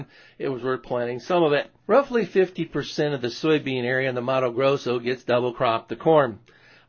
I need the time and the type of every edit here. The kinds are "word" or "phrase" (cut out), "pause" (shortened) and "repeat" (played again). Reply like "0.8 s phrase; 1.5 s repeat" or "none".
1.8 s pause